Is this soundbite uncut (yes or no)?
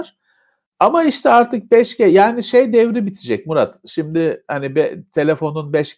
yes